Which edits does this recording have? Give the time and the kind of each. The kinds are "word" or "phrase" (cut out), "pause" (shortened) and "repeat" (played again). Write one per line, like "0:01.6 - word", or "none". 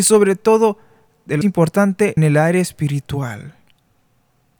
0:01.4 - word
0:02.2 - word